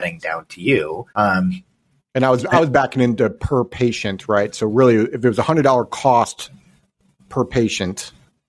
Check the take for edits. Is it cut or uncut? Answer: cut